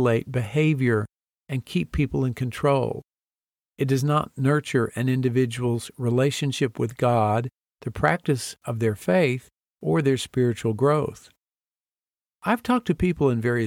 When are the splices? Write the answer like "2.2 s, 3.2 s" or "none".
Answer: none